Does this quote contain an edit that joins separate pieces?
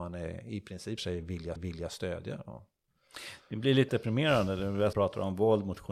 yes; 4 cuts; at 1.0 s, 1.6 s, 3.9 s, 4.9 s

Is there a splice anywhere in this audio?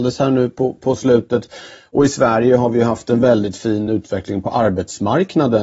no; 0 cuts

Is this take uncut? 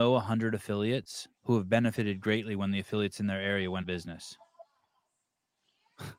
no; 2 cuts; at 1.4 s, 3.8 s

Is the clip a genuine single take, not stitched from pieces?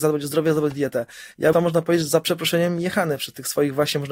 no; 1 cut; at 1.5 s

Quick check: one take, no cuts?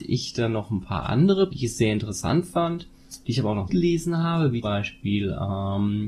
no; 3 cuts; at 1.5 s, 3.7 s, 4.6 s

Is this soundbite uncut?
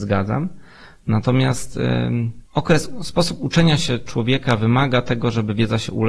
no; 1 cut; at 2.5 s

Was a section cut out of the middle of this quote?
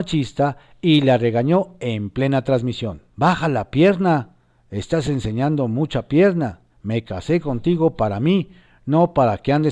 yes; 2 cuts; at 3.1 s, 6.7 s

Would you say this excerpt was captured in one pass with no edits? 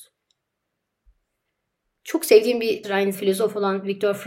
no; 2 cuts; at 2.8 s, 3.1 s

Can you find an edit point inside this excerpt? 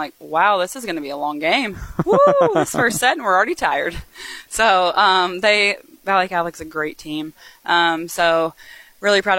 no; 0 cuts

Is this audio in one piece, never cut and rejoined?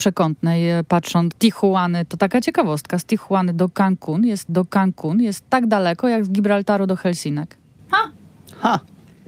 no; 3 cuts; at 1.3 s, 4.5 s, 7.8 s

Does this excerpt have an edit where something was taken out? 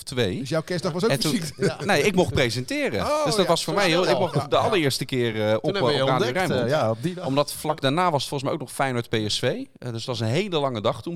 no; 0 cuts

